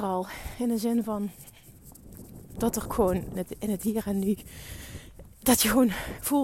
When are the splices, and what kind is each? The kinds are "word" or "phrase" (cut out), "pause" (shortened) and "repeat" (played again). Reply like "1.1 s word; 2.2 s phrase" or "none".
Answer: 2.5 s word; 2.9 s word; 3.4 s word